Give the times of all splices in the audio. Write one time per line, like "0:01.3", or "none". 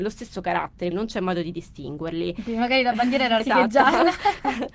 0:00.9
0:03.4